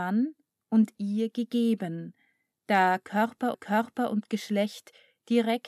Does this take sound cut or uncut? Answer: cut